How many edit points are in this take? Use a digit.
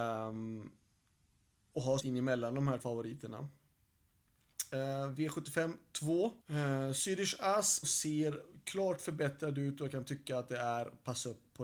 4